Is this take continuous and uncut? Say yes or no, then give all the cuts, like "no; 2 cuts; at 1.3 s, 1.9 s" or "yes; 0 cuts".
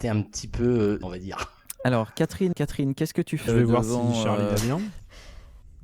no; 3 cuts; at 1.0 s, 2.5 s, 3.5 s